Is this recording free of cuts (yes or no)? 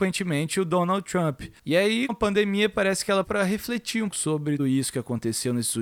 no